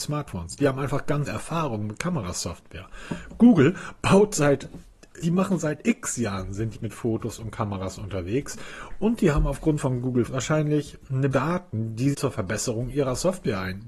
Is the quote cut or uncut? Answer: cut